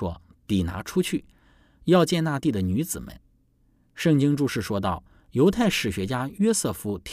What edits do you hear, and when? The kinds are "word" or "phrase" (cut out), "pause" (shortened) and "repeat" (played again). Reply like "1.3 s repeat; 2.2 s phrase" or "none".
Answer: none